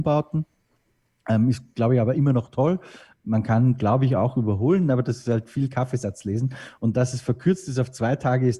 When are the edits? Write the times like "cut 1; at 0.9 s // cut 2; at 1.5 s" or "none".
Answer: none